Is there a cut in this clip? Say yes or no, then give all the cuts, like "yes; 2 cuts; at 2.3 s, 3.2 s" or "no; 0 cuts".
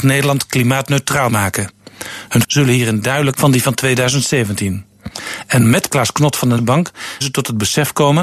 yes; 6 cuts; at 1.3 s, 2.4 s, 3.3 s, 5.9 s, 6.6 s, 7.2 s